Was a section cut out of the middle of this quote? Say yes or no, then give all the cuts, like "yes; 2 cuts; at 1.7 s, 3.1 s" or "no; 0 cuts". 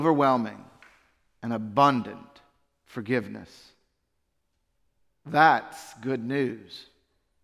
no; 0 cuts